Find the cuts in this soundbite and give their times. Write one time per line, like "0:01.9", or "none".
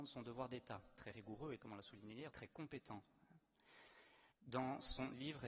0:01.6
0:02.3
0:04.3